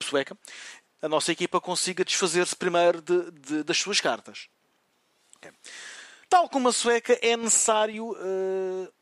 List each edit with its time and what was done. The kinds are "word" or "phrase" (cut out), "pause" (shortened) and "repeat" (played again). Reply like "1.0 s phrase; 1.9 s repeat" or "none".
6.2 s pause

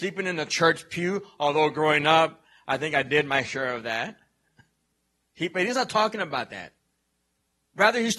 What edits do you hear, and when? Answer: none

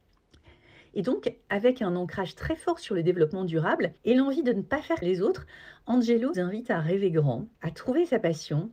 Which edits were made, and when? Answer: 4.0 s pause; 5.0 s word; 6.3 s word; 7.5 s pause

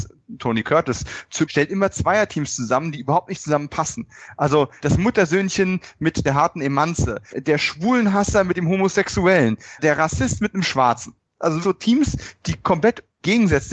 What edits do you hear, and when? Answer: 1.4 s word; 7.3 s word; 9.8 s word; 11.6 s word

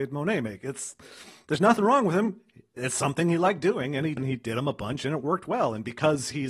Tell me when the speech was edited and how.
4.2 s phrase

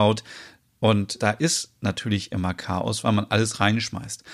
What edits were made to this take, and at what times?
1.2 s word

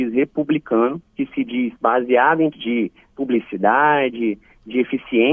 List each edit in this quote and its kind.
1.1 s pause; 1.8 s pause; 2.5 s word

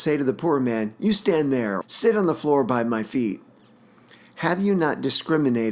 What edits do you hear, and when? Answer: 1.8 s word

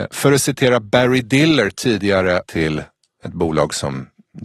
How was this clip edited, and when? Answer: 2.4 s phrase

